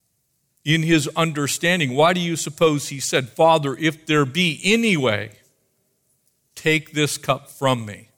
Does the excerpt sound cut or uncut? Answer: uncut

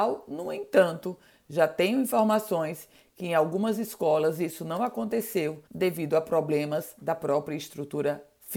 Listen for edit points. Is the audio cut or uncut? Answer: cut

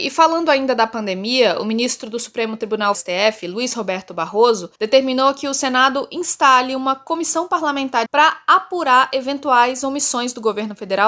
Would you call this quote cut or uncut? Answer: cut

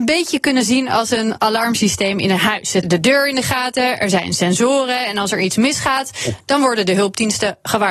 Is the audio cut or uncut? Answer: cut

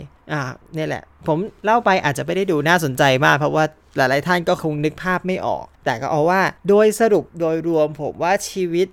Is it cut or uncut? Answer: cut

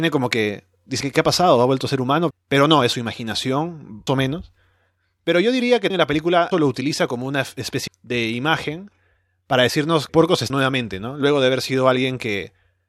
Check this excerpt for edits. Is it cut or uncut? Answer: cut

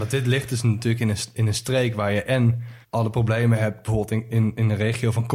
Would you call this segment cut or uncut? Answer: cut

